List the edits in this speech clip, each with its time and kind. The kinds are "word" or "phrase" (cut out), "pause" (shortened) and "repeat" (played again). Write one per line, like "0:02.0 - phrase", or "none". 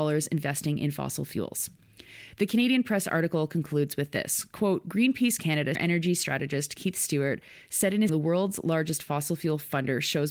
0:05.7 - word
0:08.1 - phrase